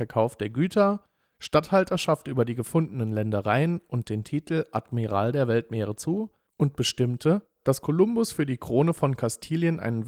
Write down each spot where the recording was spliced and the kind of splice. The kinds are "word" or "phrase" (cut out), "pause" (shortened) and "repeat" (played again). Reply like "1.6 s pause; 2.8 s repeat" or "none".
6.5 s pause